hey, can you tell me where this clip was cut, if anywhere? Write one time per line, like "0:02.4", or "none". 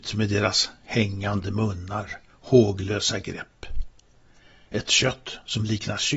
none

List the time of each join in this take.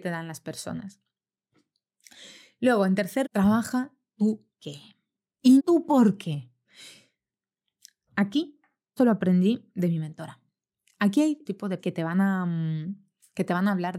0:03.2
0:04.6
0:05.6
0:09.0
0:11.5
0:11.8

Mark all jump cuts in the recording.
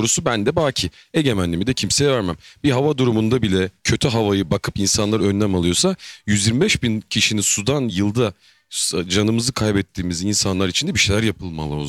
none

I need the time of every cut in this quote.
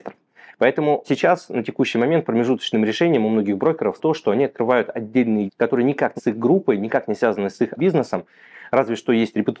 0:01.0
0:04.0
0:05.5
0:06.2
0:07.8

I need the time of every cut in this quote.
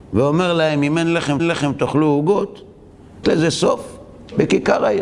0:01.4
0:03.2

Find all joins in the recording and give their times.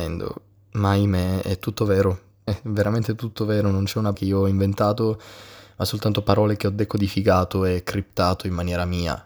0:02.5
0:04.1

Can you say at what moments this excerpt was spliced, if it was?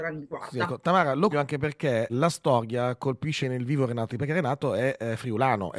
0:01.3
0:02.1
0:03.4
0:04.1

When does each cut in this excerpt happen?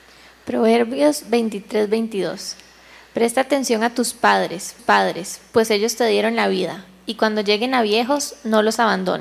0:04.8

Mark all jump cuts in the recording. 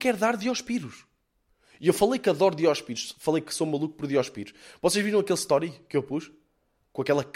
none

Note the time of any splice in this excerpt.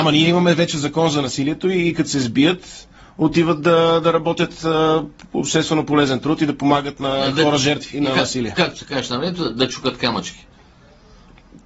none

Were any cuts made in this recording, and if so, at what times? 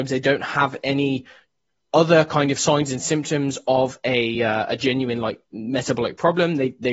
none

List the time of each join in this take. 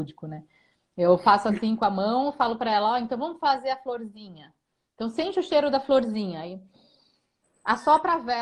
none

